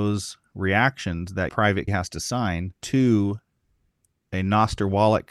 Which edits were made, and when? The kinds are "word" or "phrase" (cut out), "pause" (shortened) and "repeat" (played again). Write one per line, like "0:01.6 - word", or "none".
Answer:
0:01.5 - word
0:01.9 - word
0:02.8 - pause